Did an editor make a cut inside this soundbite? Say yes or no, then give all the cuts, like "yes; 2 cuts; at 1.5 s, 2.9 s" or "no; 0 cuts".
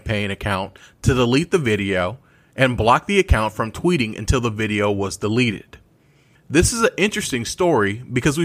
no; 0 cuts